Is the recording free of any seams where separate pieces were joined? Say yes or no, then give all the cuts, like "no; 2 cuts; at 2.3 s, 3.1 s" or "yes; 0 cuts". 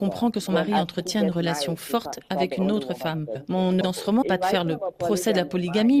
no; 2 cuts; at 3.8 s, 4.2 s